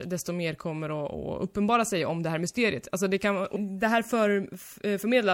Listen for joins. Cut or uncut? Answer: cut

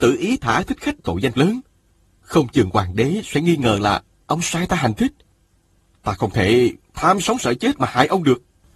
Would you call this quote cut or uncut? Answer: cut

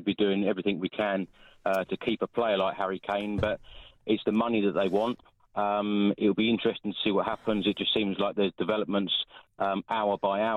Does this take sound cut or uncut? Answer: uncut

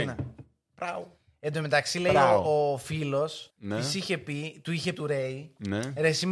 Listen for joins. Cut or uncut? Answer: cut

